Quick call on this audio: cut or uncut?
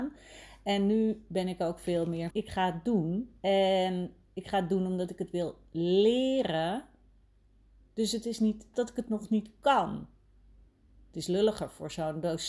cut